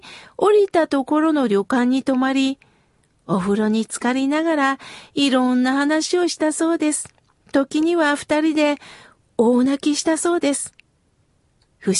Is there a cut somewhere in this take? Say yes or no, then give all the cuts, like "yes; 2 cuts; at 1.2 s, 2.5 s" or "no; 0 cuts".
no; 0 cuts